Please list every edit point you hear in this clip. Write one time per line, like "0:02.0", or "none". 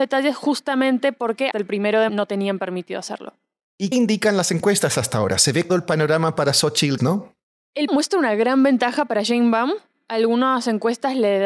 0:01.5
0:02.1
0:03.9
0:05.7
0:07.0
0:07.9